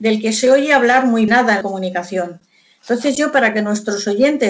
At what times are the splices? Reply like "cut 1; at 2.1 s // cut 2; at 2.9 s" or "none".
cut 1; at 1.3 s // cut 2; at 1.6 s